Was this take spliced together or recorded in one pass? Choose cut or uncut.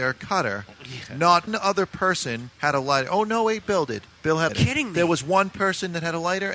cut